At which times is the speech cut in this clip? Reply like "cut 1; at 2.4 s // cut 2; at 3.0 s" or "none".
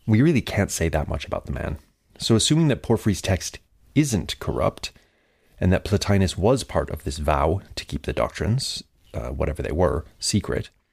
none